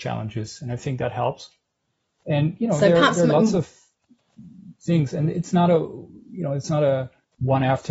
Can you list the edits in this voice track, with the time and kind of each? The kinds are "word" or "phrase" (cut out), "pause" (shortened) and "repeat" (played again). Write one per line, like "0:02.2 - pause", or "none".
none